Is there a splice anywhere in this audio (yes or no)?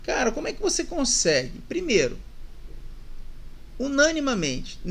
no